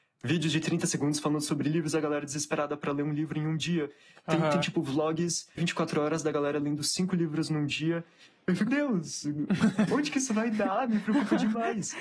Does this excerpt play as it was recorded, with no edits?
no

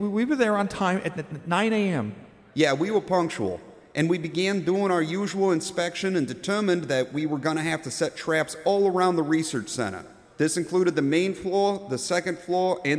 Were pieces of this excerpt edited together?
no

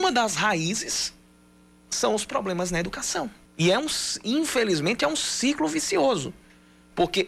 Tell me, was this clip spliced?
yes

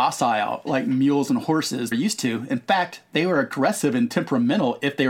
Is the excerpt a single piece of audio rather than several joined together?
no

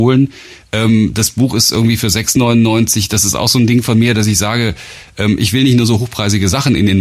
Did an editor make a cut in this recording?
no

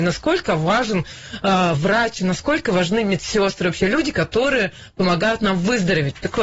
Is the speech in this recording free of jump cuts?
yes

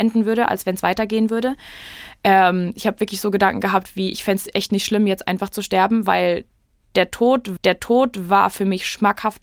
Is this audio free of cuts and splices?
no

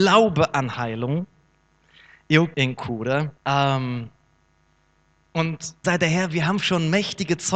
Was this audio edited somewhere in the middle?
yes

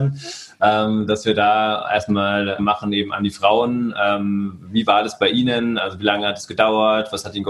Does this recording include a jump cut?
yes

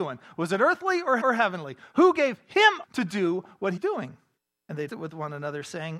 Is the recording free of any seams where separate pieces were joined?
no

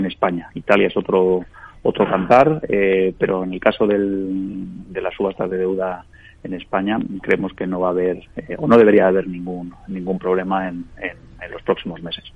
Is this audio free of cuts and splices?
yes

